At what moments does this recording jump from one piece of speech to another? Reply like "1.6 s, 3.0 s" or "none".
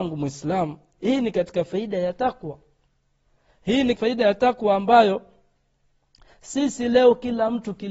4.0 s